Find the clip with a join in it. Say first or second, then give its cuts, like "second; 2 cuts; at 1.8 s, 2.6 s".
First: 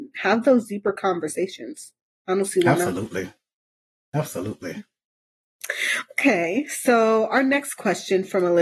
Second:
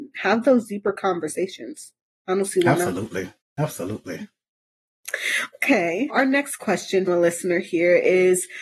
second; 3 cuts; at 3.4 s, 6.1 s, 7.1 s